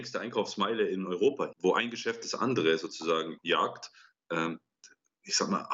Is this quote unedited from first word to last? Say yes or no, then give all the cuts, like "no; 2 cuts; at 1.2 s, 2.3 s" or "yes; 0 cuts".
no; 2 cuts; at 1.5 s, 3.4 s